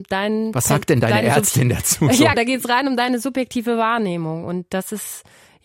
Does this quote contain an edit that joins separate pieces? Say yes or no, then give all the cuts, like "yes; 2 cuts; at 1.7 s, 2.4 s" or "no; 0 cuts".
yes; 1 cut; at 2.3 s